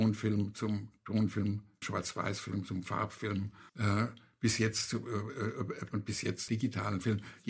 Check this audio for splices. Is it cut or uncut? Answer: cut